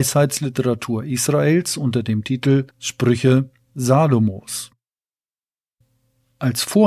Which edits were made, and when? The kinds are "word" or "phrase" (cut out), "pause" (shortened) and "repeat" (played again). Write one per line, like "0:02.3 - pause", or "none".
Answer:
0:02.7 - pause